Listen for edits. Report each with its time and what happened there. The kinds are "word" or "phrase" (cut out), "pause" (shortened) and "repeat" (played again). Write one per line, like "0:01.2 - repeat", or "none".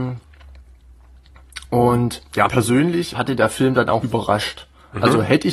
0:02.5 - word
0:03.1 - word
0:04.0 - word